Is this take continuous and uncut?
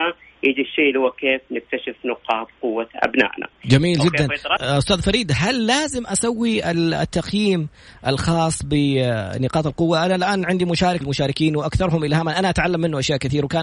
no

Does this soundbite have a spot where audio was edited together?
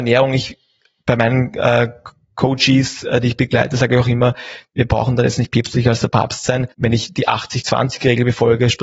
yes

